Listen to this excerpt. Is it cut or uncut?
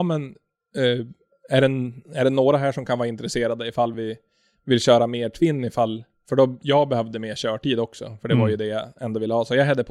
uncut